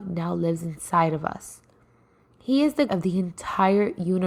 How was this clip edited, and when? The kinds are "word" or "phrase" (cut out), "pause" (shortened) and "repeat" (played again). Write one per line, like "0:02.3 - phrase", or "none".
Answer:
0:02.9 - word